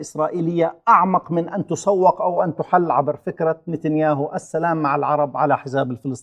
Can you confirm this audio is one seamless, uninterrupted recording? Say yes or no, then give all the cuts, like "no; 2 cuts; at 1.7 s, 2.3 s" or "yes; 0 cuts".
yes; 0 cuts